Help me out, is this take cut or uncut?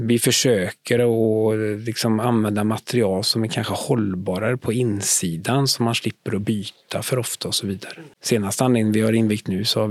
uncut